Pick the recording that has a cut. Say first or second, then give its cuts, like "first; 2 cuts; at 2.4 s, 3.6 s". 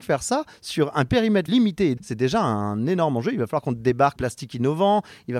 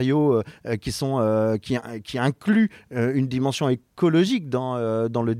first; 3 cuts; at 1.5 s, 2.0 s, 4.2 s